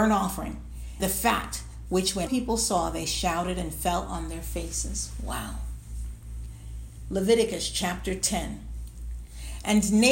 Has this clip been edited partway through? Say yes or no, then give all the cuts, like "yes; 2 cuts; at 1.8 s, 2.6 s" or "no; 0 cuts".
yes; 2 cuts; at 1.0 s, 2.3 s